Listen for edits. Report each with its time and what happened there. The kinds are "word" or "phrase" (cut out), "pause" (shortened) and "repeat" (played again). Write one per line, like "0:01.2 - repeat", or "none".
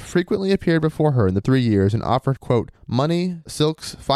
0:01.4 - word
0:02.4 - word
0:02.8 - pause